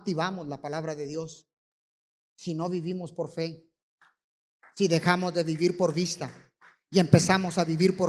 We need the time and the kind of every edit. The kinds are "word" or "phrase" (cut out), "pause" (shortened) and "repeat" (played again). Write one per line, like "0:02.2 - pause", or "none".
none